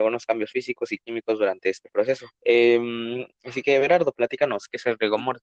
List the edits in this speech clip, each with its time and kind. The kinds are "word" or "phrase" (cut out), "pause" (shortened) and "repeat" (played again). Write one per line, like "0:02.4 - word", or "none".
0:02.3 - pause